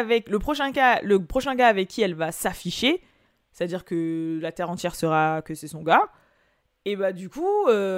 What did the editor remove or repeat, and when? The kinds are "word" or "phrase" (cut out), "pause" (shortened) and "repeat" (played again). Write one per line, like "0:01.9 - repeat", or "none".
none